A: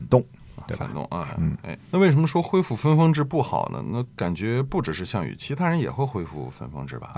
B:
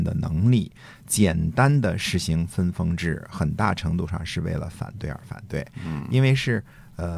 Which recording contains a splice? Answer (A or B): A